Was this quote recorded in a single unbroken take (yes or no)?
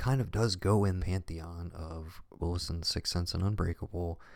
no